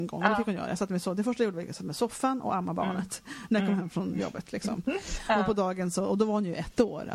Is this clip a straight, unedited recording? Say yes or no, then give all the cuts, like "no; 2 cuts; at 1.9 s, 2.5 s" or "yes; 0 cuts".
yes; 0 cuts